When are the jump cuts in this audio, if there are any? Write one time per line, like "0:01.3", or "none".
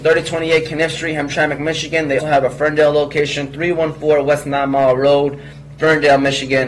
0:02.2